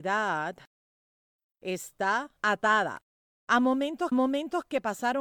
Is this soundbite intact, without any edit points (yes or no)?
no